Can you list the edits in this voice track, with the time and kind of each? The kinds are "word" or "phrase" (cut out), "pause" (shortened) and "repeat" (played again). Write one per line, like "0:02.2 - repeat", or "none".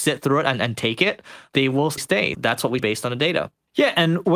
0:02.0 - word
0:02.3 - word
0:02.8 - word